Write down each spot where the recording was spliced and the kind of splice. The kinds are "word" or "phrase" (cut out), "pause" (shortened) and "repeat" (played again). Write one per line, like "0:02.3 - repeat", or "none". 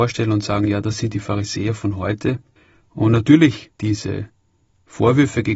0:02.6 - pause
0:03.7 - pause